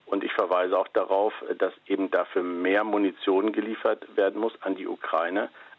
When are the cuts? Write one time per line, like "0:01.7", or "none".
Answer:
none